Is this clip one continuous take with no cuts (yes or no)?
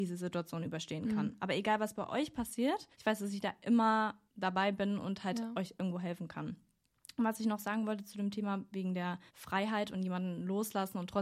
no